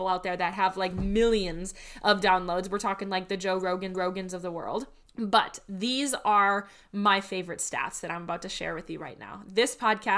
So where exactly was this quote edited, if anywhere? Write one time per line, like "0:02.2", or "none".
0:03.9
0:05.1